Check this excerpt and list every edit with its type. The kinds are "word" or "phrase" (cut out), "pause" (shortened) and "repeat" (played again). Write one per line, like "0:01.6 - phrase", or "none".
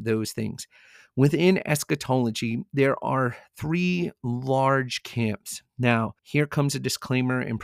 0:06.2 - pause